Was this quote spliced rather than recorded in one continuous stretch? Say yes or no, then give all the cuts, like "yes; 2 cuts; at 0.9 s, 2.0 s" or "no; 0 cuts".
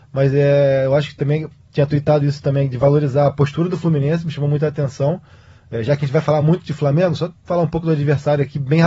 no; 0 cuts